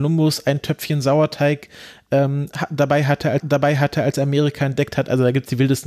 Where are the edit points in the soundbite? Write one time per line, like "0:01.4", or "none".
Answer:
0:03.4